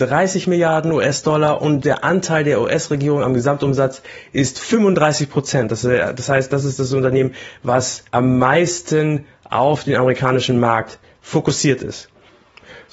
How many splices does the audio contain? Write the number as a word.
one